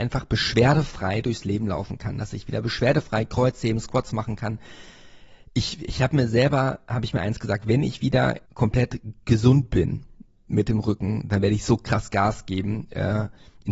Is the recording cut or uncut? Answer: cut